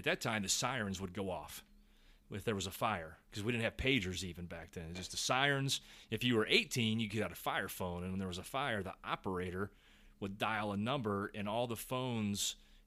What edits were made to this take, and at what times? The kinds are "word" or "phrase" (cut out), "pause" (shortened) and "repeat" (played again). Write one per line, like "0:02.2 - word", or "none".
none